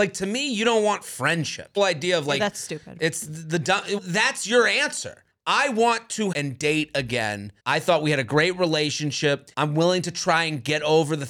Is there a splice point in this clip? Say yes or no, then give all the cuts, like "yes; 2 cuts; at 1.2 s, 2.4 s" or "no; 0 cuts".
yes; 6 cuts; at 1.8 s, 4.0 s, 5.3 s, 6.3 s, 7.6 s, 9.5 s